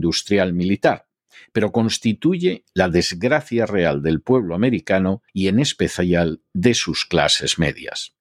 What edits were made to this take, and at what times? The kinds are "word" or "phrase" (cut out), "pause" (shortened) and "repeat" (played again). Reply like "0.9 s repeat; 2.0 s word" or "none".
5.3 s pause